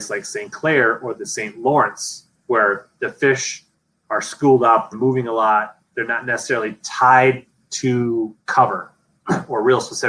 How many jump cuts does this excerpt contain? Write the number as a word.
three